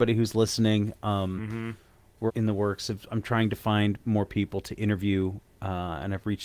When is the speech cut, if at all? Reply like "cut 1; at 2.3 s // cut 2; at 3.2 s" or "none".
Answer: cut 1; at 2.3 s